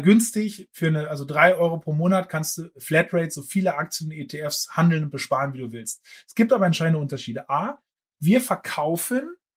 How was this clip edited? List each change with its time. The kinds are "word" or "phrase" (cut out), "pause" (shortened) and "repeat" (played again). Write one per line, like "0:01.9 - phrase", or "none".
none